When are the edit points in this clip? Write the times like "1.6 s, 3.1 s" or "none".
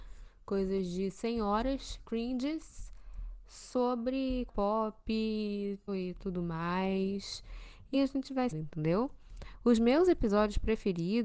2.0 s, 4.5 s, 5.9 s, 7.9 s, 8.5 s